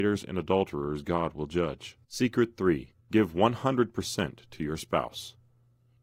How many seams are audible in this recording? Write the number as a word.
two